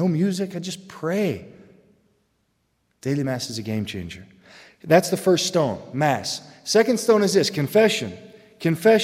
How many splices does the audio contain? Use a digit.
0